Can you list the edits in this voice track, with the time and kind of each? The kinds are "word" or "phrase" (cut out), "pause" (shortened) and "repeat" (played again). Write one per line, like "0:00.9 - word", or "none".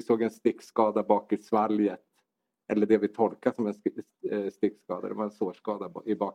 none